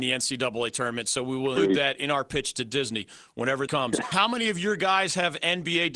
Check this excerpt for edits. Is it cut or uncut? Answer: cut